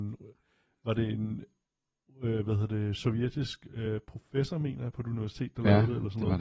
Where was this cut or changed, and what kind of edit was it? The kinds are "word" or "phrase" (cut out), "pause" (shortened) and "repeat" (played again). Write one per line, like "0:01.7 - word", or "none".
none

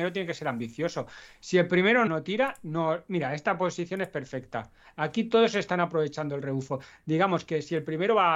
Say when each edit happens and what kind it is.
0:02.1 - word

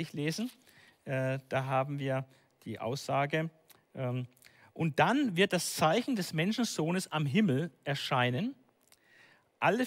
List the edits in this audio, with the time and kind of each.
none

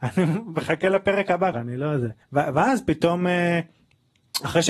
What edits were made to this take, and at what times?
0:01.5 - word
0:02.2 - pause

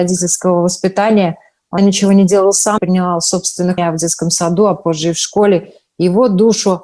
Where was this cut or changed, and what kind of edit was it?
0:01.8 - word
0:02.8 - word
0:03.8 - word

